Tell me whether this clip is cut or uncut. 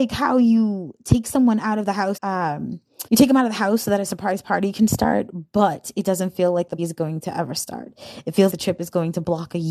cut